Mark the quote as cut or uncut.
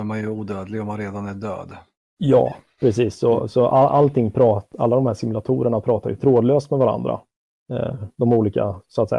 uncut